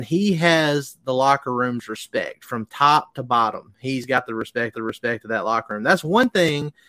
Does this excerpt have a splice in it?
yes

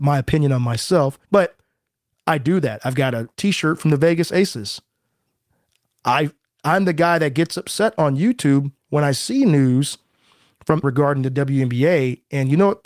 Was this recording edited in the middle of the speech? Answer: yes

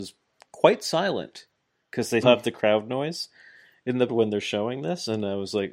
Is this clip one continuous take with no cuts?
no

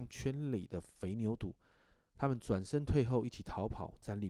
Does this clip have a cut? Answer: no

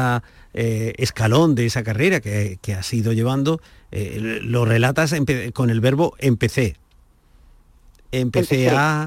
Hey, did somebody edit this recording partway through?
no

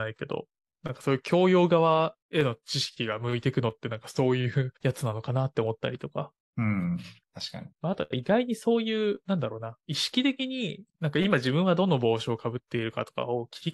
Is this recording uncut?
no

